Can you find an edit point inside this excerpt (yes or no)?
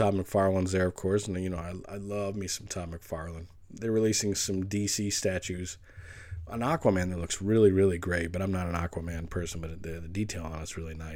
yes